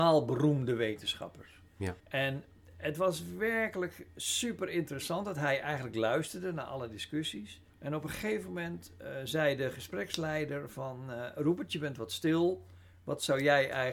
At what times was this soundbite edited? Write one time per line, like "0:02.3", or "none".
0:02.0
0:07.7